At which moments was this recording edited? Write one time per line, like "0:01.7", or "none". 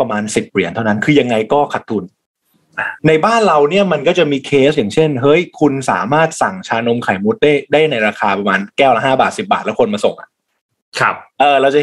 0:03.0